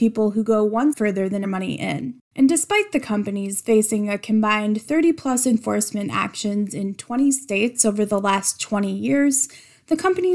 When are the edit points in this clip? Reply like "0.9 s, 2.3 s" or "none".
0.9 s, 1.4 s